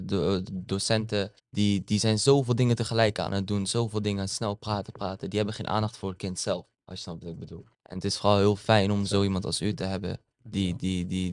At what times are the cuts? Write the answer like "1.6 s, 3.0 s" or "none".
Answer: 1.4 s, 6.7 s, 7.7 s, 10.3 s